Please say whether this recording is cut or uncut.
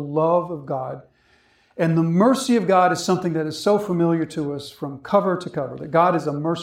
uncut